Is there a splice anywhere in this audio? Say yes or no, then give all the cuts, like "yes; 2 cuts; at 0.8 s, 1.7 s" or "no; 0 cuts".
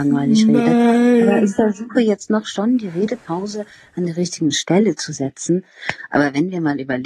no; 0 cuts